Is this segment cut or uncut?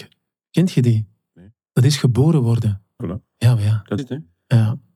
cut